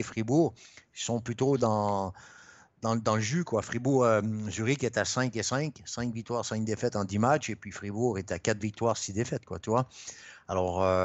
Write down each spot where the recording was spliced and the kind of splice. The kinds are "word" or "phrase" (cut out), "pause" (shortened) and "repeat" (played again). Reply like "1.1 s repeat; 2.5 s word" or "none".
none